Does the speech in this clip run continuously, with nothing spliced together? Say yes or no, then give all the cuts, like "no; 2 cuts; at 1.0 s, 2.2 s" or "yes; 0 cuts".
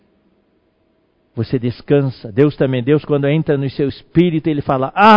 yes; 0 cuts